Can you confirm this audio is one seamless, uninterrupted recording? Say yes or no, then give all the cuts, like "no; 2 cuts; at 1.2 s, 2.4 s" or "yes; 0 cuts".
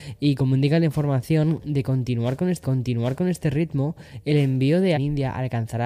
no; 2 cuts; at 2.6 s, 5.0 s